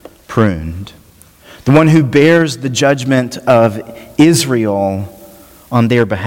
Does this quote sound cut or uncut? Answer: uncut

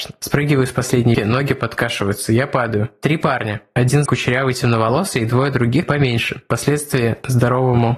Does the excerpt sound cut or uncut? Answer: cut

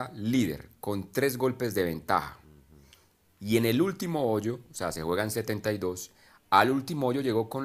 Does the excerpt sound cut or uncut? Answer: uncut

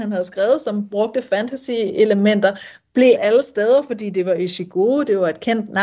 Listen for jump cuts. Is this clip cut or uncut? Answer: cut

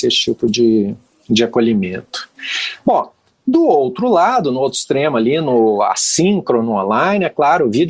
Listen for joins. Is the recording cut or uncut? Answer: uncut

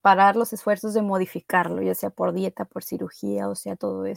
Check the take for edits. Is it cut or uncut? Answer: uncut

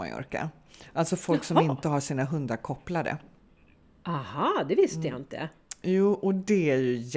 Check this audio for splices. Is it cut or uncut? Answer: uncut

